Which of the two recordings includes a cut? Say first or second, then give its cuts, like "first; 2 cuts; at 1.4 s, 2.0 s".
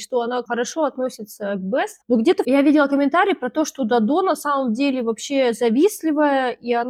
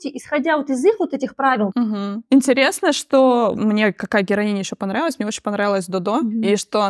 second; 2 cuts; at 2.2 s, 3.5 s